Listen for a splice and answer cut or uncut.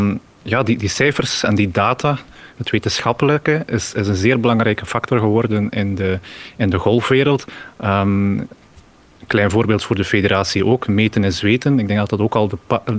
uncut